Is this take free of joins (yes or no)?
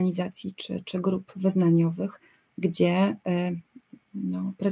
yes